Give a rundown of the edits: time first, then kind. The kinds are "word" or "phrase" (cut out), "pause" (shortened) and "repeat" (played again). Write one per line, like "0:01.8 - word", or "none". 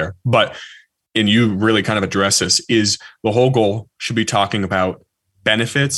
none